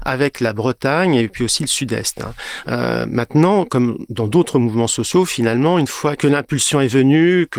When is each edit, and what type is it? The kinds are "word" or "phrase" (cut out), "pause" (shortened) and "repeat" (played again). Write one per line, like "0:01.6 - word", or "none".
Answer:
none